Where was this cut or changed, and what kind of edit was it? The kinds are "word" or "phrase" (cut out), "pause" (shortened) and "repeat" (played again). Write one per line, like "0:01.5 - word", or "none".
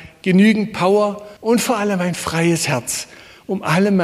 0:01.4 - pause